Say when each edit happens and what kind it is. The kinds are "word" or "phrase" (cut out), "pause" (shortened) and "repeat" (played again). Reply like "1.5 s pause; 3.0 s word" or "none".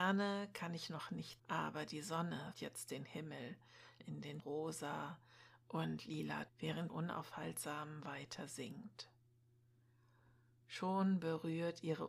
1.4 s word; 2.5 s word; 4.0 s word; 4.4 s word; 6.5 s word; 6.9 s word